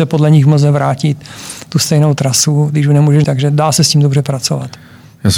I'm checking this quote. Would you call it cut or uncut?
cut